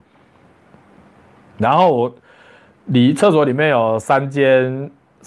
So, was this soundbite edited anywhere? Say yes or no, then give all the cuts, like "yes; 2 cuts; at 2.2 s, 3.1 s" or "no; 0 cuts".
no; 0 cuts